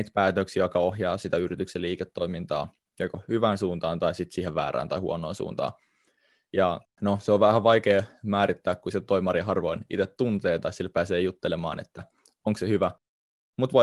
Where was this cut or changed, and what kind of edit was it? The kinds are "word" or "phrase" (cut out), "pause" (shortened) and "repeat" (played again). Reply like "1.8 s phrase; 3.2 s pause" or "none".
6.9 s pause